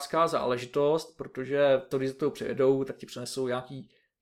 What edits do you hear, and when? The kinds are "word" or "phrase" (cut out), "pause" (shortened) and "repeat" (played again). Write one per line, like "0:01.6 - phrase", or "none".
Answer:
0:01.9 - word